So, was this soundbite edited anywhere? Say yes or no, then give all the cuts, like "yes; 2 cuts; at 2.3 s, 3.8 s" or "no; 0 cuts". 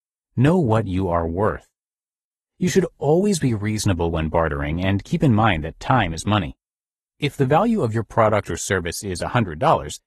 no; 0 cuts